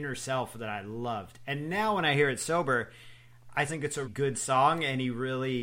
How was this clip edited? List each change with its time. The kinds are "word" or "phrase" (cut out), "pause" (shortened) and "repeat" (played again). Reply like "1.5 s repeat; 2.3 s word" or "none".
3.7 s word; 4.0 s word